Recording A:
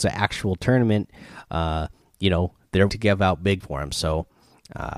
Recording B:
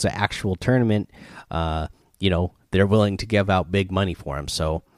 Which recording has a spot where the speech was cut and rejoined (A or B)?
A